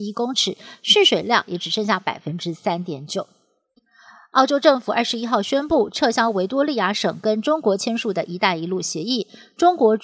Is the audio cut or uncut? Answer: uncut